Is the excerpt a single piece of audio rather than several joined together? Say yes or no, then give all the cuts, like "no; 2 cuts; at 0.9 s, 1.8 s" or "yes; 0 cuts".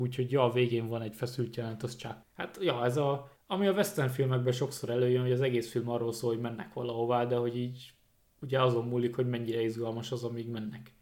yes; 0 cuts